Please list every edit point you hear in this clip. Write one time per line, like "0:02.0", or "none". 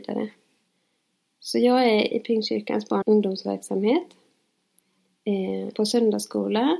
0:02.1
0:03.0
0:05.7

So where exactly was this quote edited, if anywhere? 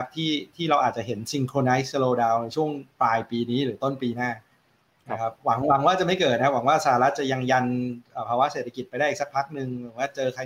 none

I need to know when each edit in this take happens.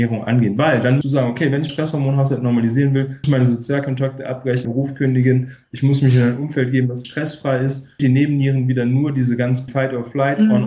0:01.0
0:01.7
0:03.2
0:04.6
0:07.0
0:08.0
0:09.7

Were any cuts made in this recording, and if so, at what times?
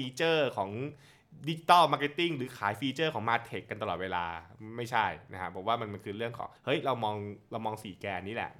0:06.6

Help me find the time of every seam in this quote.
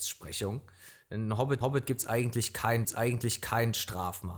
0:01.6
0:02.8

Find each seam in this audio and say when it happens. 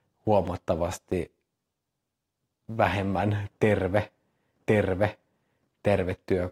0:04.6

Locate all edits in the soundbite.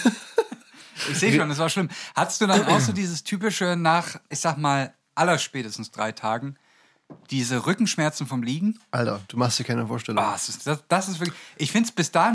0:04.3

